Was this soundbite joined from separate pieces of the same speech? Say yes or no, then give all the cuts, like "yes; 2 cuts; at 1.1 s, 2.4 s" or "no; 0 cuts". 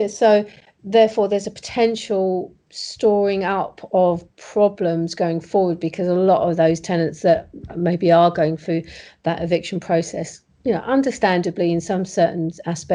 no; 0 cuts